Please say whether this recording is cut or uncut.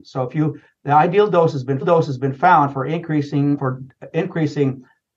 cut